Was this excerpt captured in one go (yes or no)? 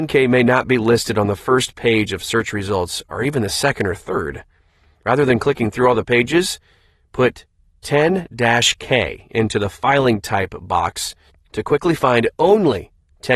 yes